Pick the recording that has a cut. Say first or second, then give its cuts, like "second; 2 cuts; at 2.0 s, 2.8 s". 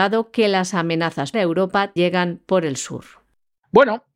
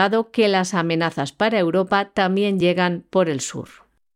first; 2 cuts; at 1.3 s, 2.0 s